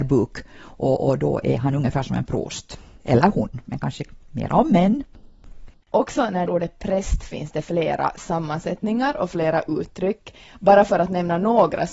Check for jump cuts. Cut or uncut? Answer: cut